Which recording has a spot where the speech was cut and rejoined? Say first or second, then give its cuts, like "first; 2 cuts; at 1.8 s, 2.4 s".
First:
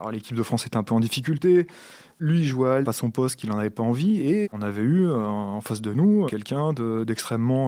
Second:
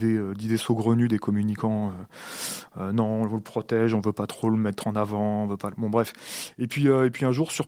first; 3 cuts; at 2.8 s, 4.4 s, 6.3 s